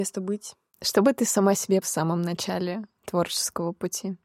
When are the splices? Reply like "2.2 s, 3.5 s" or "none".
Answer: 1.8 s